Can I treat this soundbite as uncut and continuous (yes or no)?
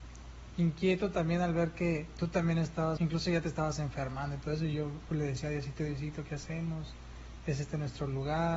no